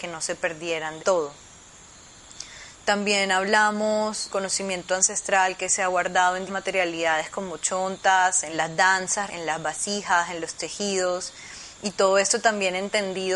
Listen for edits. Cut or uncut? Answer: cut